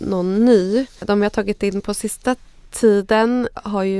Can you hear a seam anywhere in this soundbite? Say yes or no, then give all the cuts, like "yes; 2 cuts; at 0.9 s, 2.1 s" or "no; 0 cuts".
no; 0 cuts